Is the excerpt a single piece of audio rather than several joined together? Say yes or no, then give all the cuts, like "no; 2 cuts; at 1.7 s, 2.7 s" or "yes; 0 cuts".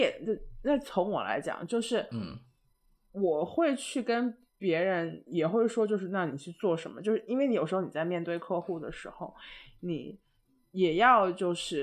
no; 1 cut; at 4.5 s